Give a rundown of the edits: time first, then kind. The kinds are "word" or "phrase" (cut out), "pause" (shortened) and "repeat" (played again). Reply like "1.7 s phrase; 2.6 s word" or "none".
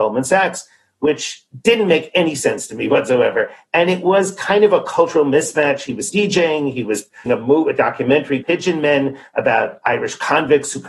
6.1 s word; 7.3 s word; 8.4 s word